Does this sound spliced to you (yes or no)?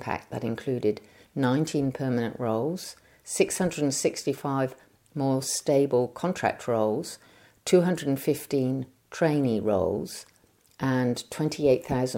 no